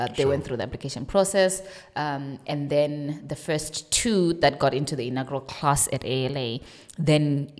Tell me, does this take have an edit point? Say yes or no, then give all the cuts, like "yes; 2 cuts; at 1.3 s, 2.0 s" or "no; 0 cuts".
no; 0 cuts